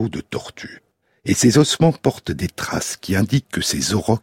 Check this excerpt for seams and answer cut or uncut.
cut